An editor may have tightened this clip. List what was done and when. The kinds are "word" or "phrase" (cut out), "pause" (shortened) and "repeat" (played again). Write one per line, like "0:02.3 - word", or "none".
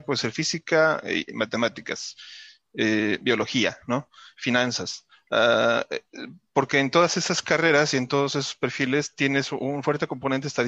0:03.8 - pause